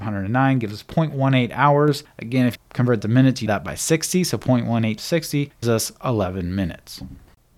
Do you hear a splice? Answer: yes; 5 cuts; at 2.5 s, 3.0 s, 3.5 s, 5.0 s, 5.6 s

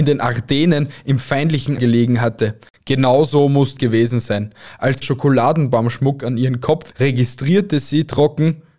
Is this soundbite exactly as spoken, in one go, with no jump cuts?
no; 4 cuts; at 1.8 s, 3.8 s, 5.0 s, 6.9 s

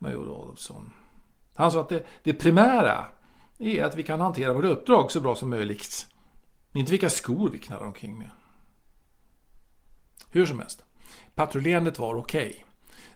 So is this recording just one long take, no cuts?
yes; 0 cuts

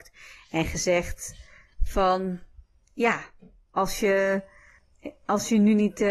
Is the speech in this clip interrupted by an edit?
no; 0 cuts

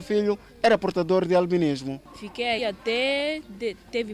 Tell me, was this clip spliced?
yes; 1 cut; at 2.6 s

